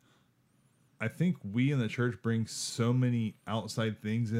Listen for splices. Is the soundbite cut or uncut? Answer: uncut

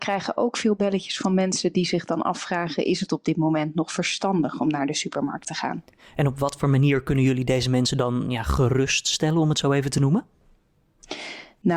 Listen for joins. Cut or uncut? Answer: uncut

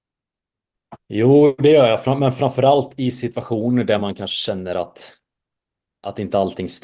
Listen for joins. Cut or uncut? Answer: uncut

